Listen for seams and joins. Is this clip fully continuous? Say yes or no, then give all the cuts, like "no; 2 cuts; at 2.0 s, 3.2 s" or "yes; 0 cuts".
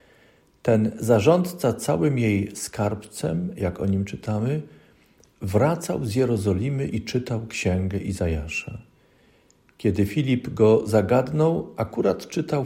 yes; 0 cuts